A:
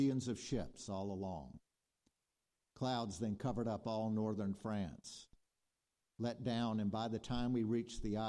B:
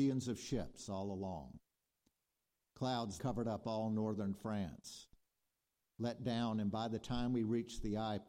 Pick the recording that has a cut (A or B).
B